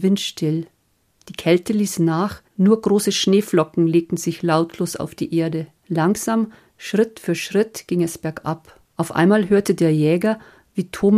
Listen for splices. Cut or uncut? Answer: cut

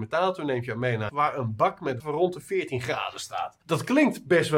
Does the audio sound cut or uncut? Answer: cut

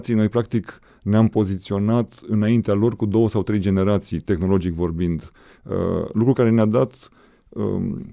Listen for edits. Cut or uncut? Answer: uncut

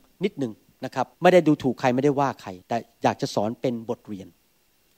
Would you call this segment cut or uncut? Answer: cut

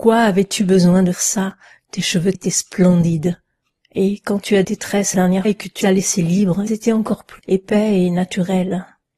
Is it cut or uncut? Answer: cut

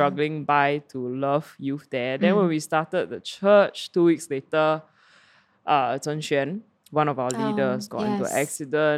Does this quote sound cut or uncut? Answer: uncut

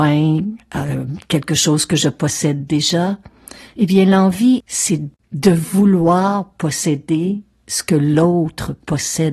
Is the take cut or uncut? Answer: uncut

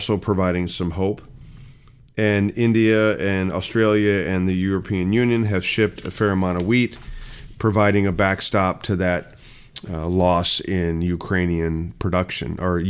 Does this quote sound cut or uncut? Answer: uncut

